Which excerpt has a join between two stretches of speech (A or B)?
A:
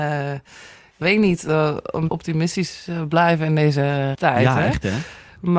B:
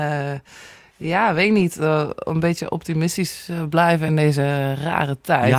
A